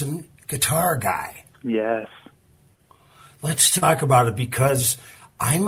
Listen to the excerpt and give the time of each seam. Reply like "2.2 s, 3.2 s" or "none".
1.5 s